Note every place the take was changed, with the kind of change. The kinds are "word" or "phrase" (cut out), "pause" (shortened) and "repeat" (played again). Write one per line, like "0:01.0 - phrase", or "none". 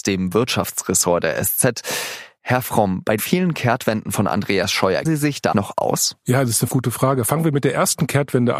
0:03.2 - word
0:05.0 - word
0:05.5 - word
0:06.7 - word